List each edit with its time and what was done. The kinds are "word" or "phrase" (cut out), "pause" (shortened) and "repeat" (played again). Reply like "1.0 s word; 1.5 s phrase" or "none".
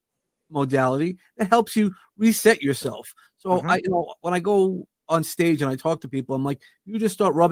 none

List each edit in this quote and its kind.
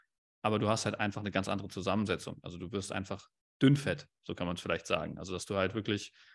3.4 s pause

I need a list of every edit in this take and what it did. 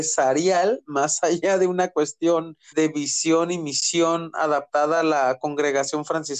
2.7 s word

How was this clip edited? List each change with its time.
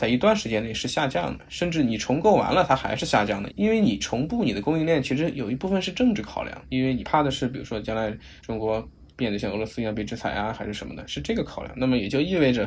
8.4 s pause; 9.1 s pause

